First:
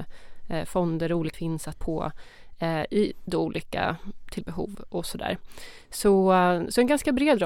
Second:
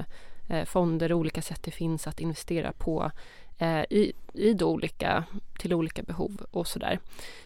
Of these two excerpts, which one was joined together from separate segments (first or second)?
first